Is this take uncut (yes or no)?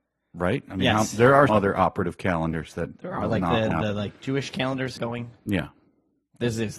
no